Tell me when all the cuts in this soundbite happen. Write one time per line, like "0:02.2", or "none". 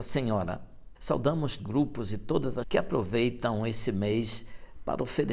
0:01.6
0:02.6